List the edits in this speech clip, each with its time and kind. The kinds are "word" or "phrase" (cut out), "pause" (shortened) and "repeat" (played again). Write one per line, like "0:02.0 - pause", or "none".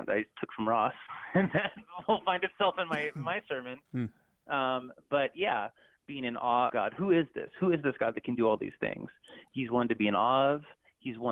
0:06.7 - word